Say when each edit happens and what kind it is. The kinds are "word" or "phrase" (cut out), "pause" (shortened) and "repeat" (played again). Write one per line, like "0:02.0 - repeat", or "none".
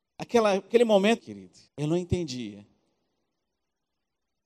0:01.2 - phrase
0:01.7 - pause